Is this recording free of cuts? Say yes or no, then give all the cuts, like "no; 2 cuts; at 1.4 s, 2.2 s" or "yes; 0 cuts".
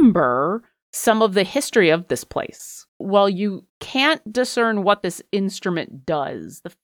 no; 2 cuts; at 2.9 s, 3.7 s